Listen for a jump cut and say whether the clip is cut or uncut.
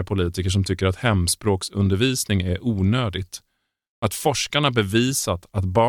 uncut